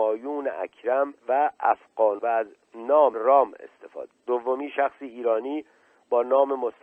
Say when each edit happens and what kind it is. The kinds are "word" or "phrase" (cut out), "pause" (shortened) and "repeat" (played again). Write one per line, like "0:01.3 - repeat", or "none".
0:01.2 - pause
0:02.2 - phrase
0:03.1 - word
0:04.1 - word

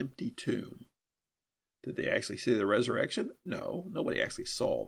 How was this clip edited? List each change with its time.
none

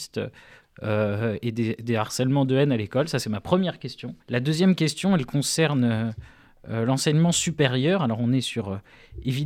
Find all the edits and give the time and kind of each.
0:04.2 - pause

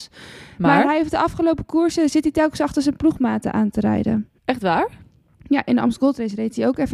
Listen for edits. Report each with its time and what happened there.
0:04.4 - pause

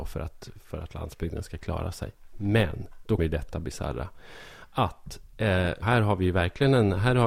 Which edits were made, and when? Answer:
0:03.2 - word
0:05.8 - word

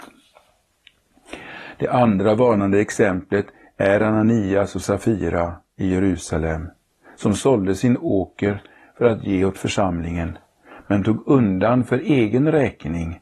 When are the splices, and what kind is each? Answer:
none

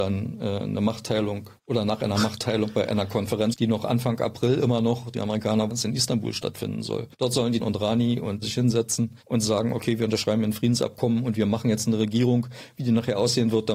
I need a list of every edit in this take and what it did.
0:01.6 - pause
0:03.5 - word
0:05.7 - word
0:07.1 - pause
0:07.6 - word
0:08.4 - word
0:09.2 - pause

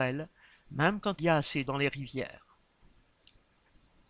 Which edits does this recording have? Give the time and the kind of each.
0:01.2 - word
0:01.7 - word

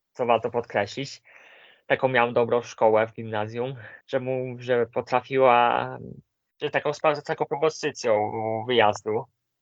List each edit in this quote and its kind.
0:04.0 - pause

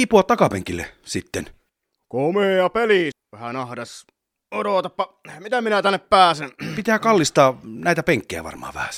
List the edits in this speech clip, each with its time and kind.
0:03.1 - word

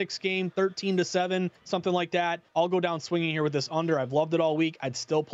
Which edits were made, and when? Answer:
0:01.6 - pause
0:02.5 - pause

